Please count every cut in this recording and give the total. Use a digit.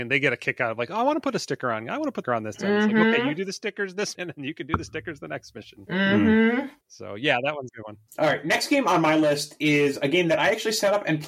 4